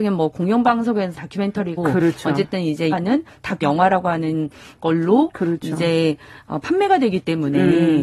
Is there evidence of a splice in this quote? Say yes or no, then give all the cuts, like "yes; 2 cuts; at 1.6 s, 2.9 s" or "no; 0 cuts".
yes; 4 cuts; at 1.1 s, 1.8 s, 2.9 s, 3.6 s